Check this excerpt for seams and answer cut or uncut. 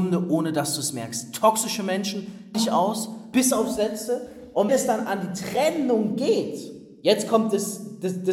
cut